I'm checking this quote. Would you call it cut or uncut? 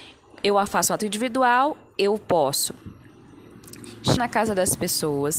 cut